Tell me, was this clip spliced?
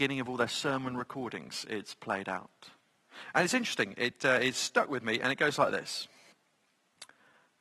no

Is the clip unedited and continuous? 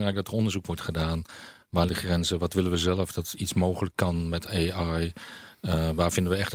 no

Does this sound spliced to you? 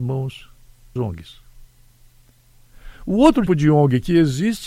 yes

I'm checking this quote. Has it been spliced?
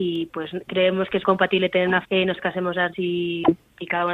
yes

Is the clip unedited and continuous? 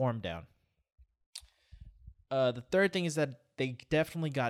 yes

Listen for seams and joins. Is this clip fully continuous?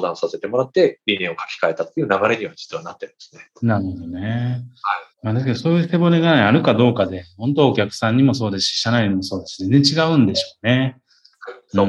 no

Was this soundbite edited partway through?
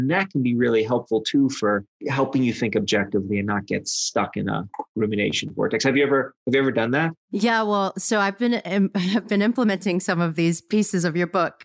no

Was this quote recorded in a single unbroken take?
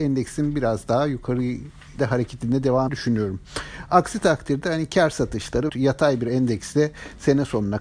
no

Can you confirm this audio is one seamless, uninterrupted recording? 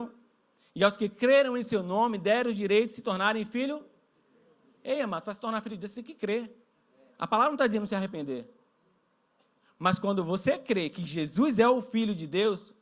yes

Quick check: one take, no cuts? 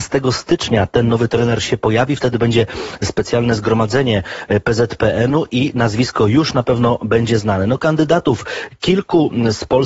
yes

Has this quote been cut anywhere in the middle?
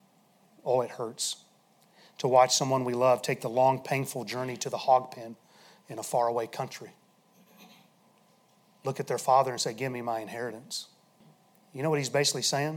no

